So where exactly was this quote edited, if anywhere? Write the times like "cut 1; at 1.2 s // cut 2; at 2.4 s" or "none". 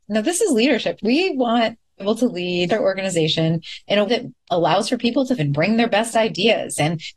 cut 1; at 1.0 s // cut 2; at 2.0 s // cut 3; at 2.7 s // cut 4; at 4.1 s // cut 5; at 5.4 s